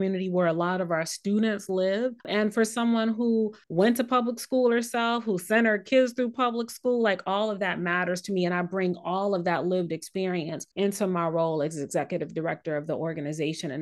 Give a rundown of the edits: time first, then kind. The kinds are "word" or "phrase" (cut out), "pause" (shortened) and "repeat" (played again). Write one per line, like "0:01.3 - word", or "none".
0:02.2 - pause
0:03.6 - pause
0:10.7 - pause